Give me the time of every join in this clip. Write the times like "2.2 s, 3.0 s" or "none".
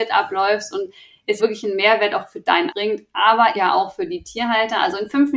1.4 s, 2.7 s, 3.6 s